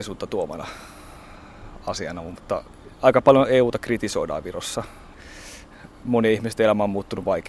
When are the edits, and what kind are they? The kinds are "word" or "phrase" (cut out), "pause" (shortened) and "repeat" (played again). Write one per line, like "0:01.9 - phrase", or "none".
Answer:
none